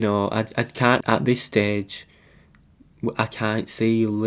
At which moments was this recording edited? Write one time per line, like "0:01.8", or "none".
0:01.0